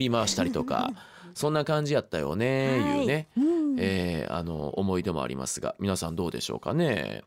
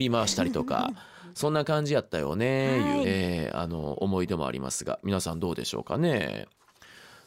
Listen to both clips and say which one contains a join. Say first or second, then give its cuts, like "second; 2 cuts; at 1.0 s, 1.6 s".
second; 1 cut; at 3.0 s